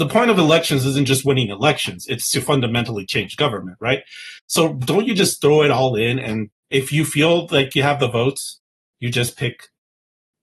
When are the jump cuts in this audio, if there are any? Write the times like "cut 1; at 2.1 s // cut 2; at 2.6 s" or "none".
cut 1; at 6.5 s